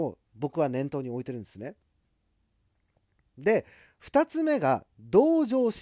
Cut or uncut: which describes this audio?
uncut